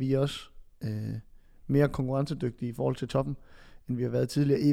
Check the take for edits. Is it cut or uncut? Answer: uncut